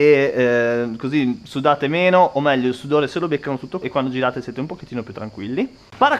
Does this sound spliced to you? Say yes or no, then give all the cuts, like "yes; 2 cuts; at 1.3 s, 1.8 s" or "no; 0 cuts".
yes; 1 cut; at 3.8 s